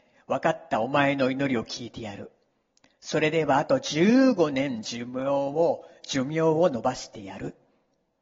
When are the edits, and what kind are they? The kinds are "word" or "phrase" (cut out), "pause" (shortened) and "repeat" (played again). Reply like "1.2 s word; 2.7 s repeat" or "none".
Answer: none